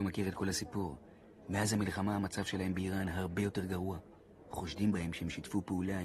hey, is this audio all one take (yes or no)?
yes